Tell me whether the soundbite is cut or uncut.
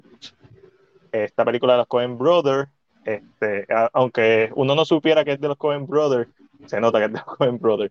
uncut